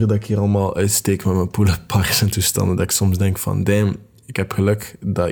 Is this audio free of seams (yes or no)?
yes